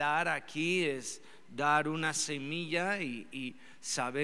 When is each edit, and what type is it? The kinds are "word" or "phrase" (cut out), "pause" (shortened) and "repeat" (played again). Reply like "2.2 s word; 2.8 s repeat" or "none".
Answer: none